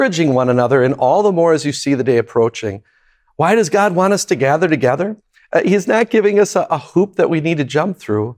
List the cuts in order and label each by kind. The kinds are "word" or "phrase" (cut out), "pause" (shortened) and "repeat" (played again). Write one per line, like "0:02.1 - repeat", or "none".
none